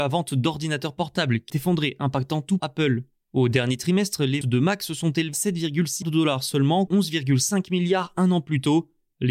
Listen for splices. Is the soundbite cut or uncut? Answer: cut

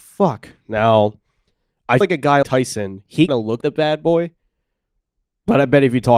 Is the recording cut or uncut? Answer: cut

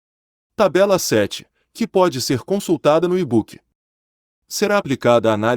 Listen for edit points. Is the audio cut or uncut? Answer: uncut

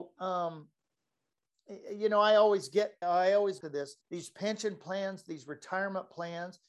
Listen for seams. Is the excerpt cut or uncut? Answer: cut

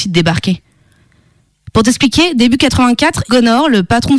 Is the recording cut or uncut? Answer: cut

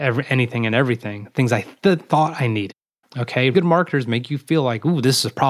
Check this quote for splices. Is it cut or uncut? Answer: cut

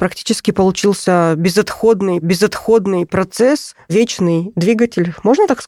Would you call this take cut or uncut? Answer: cut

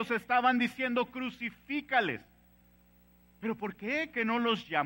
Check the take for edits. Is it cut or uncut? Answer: uncut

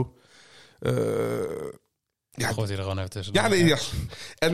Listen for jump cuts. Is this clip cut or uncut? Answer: uncut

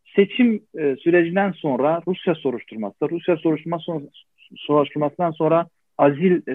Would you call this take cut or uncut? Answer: uncut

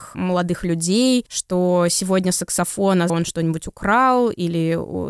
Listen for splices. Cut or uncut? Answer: cut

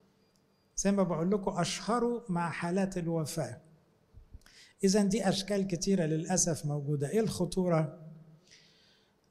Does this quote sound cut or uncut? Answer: uncut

